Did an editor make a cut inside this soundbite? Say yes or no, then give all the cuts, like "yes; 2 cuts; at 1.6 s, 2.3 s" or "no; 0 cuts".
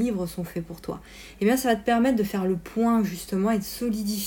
no; 0 cuts